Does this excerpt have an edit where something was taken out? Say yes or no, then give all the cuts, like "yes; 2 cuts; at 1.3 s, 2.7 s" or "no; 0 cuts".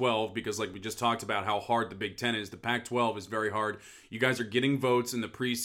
no; 0 cuts